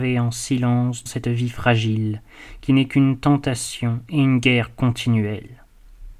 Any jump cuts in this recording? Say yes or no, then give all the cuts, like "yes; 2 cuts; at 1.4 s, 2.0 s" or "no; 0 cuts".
yes; 1 cut; at 1.1 s